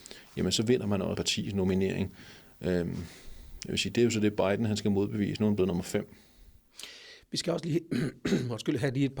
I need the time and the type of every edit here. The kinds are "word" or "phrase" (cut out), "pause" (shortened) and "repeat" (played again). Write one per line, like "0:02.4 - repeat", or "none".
0:01.1 - word